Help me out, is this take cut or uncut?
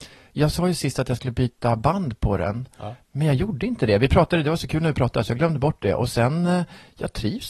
uncut